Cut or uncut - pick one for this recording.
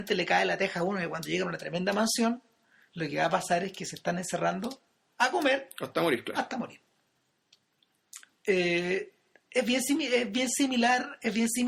uncut